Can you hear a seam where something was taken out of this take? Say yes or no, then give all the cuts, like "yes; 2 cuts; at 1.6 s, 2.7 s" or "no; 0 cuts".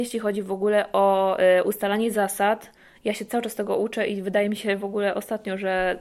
no; 0 cuts